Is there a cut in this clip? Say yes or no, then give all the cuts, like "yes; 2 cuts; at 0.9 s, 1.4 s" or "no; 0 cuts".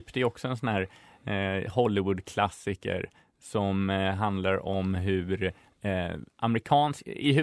no; 0 cuts